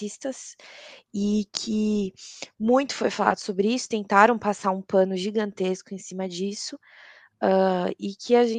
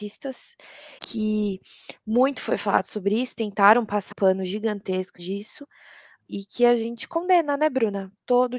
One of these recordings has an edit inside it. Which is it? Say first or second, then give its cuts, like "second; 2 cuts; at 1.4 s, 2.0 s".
second; 4 cuts; at 1.0 s, 4.1 s, 5.2 s, 6.3 s